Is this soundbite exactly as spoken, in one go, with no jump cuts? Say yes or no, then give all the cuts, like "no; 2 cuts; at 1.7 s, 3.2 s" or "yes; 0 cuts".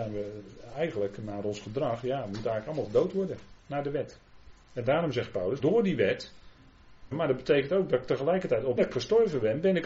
no; 5 cuts; at 3.6 s, 4.6 s, 5.6 s, 7.1 s, 8.8 s